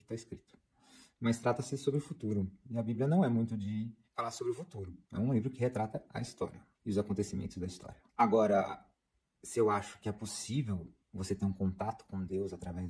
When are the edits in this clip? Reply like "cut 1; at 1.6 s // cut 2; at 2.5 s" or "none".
cut 1; at 4.0 s // cut 2; at 5.0 s // cut 3; at 6.7 s // cut 4; at 8.1 s // cut 5; at 11.0 s